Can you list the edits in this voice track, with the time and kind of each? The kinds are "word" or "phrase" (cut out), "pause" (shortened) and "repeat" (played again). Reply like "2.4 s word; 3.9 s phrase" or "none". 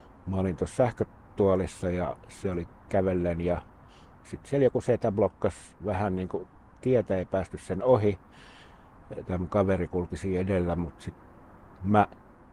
none